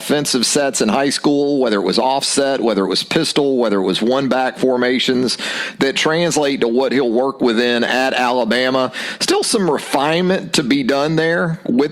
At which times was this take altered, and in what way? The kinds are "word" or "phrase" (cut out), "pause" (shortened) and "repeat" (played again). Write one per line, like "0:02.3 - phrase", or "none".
none